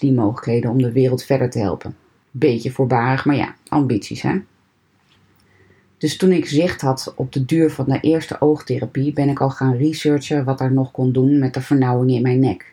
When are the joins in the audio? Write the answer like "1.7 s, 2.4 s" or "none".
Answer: none

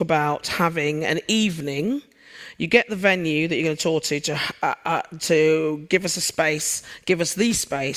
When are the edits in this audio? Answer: none

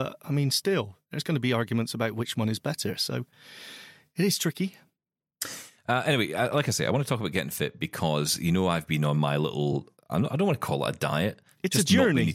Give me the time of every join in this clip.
none

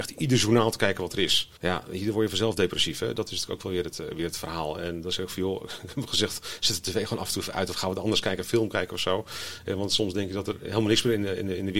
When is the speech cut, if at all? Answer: 1.6 s

